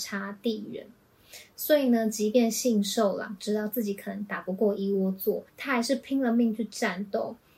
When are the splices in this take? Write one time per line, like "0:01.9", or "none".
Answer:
0:05.5